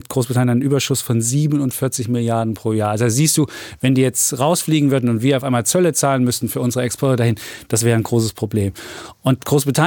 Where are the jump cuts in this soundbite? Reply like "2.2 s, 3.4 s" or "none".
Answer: none

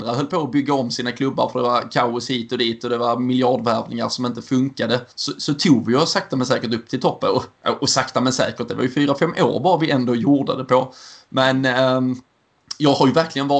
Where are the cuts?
5.1 s

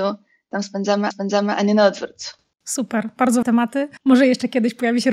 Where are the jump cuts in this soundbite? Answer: 1.1 s, 2.5 s, 3.4 s, 4.0 s

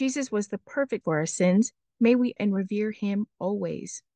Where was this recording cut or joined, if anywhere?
1.0 s, 2.4 s

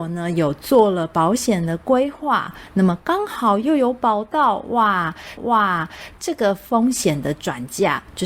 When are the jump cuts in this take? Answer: 5.4 s

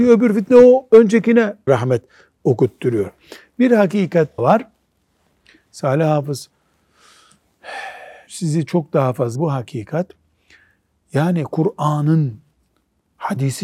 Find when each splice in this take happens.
1.7 s, 4.4 s, 8.3 s, 9.3 s

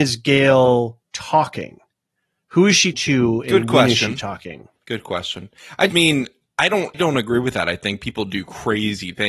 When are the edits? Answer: 1.1 s, 2.9 s, 4.8 s, 5.9 s, 6.9 s

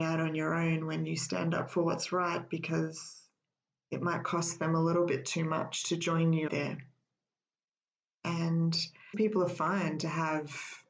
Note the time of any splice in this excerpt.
6.5 s, 9.1 s

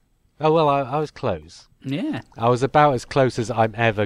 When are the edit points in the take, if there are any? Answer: 2.3 s

